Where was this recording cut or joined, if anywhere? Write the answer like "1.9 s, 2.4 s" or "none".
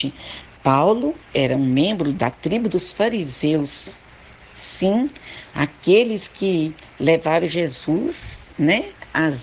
none